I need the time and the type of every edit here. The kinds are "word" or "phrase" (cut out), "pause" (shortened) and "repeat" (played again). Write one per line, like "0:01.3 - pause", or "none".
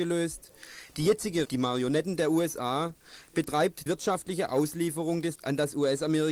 0:01.4 - word
0:03.9 - word
0:05.3 - word